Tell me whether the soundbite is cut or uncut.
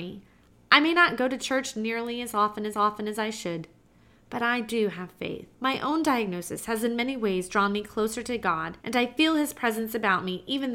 cut